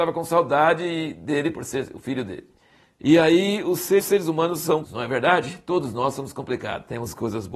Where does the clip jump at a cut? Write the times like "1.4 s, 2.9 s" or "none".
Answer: 4.0 s, 4.8 s